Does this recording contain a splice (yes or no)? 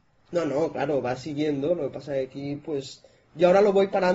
no